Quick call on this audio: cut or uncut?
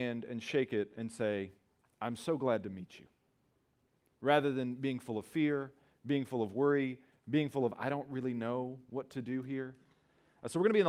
uncut